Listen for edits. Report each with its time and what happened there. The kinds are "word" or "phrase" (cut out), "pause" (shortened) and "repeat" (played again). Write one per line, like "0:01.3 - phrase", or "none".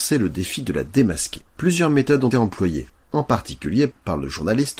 0:01.5 - pause
0:02.3 - word